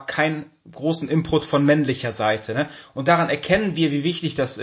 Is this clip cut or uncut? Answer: uncut